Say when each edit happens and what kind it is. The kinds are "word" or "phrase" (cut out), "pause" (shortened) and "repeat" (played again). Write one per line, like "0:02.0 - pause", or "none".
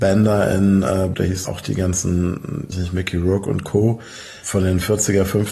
0:01.1 - phrase
0:01.4 - phrase
0:02.7 - word